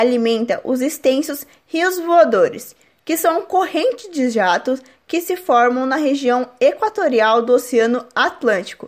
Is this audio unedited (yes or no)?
yes